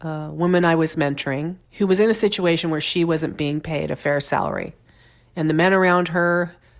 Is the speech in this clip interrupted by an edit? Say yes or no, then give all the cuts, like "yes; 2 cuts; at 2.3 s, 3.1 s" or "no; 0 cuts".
yes; 1 cut; at 1.6 s